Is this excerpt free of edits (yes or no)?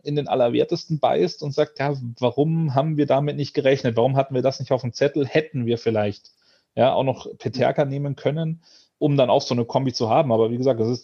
yes